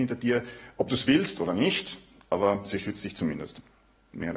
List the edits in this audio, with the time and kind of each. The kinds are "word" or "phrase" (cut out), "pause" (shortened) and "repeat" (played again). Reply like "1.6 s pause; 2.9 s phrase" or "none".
none